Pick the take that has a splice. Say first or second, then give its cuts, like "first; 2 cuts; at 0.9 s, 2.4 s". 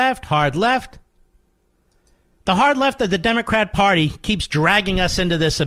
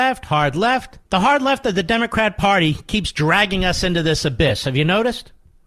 second; 1 cut; at 1.0 s